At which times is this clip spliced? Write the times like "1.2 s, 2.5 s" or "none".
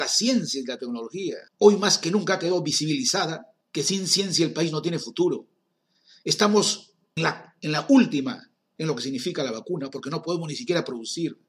1.5 s, 3.6 s, 7.2 s, 8.8 s